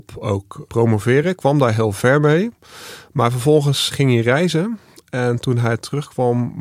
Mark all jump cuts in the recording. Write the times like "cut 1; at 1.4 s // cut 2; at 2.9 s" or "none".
none